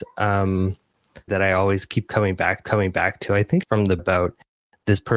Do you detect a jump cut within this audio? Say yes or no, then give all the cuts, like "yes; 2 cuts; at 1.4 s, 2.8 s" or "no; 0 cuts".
yes; 4 cuts; at 1.3 s, 2.6 s, 3.6 s, 4.0 s